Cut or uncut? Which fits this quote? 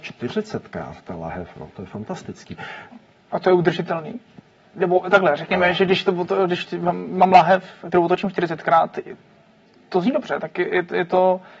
uncut